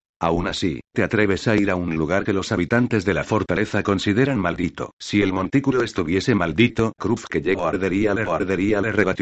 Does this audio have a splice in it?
yes; 3 cuts; at 5.0 s, 7.0 s, 8.3 s

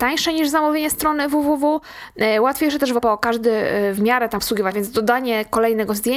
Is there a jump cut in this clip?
yes; 3 cuts; at 3.0 s, 4.4 s, 4.7 s

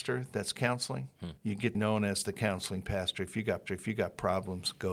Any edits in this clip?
yes; 3 cuts; at 1.4 s, 1.7 s, 3.7 s

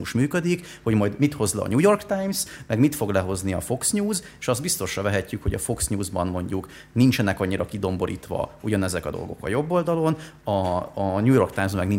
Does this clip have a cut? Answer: no; 0 cuts

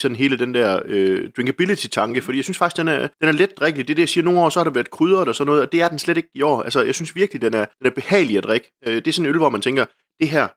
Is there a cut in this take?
yes; 3 cuts; at 3.1 s, 7.7 s, 8.8 s

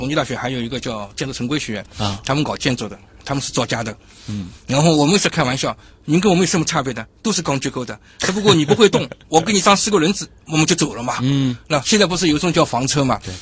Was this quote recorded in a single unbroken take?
yes; 0 cuts

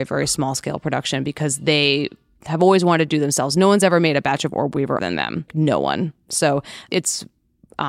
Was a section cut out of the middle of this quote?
yes; 4 cuts; at 2.4 s, 5.0 s, 5.5 s, 6.9 s

